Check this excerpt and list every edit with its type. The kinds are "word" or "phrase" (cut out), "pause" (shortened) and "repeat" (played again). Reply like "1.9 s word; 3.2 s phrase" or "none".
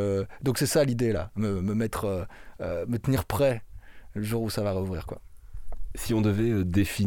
none